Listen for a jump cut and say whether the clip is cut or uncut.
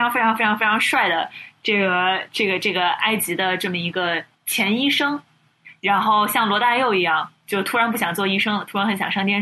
cut